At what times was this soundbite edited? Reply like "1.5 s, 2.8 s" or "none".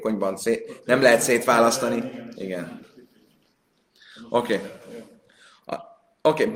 none